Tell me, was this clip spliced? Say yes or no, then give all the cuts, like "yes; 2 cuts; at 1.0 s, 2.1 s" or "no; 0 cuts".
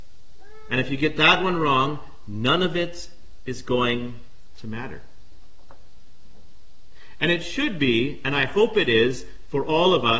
no; 0 cuts